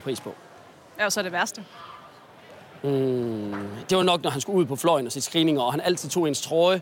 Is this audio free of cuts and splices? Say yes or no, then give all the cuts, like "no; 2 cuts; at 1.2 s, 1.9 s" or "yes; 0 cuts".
yes; 0 cuts